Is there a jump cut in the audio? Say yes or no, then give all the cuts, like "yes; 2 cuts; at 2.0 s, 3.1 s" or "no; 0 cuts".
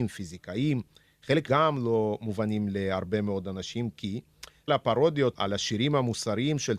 yes; 3 cuts; at 1.5 s, 4.7 s, 5.3 s